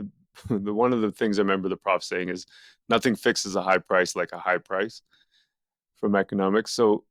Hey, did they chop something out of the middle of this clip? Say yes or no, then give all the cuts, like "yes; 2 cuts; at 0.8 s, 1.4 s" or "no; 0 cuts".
no; 0 cuts